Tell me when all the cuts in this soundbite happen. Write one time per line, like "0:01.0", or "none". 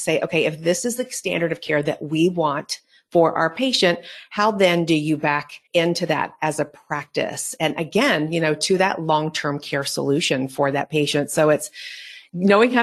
0:05.7